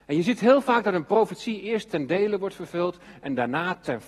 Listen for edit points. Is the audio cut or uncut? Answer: uncut